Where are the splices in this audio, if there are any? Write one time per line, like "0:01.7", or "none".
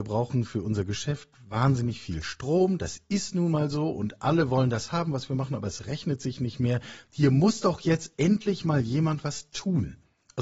none